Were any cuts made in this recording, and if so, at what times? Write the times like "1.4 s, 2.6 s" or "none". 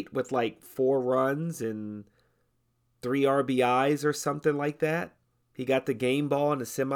5.2 s